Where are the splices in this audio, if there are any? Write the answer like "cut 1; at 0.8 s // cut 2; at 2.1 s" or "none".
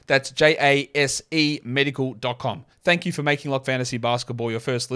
cut 1; at 2.7 s // cut 2; at 3.6 s